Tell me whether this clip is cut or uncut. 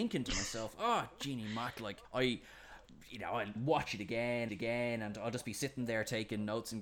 cut